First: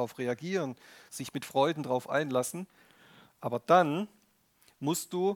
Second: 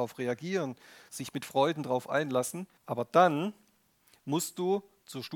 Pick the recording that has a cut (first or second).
second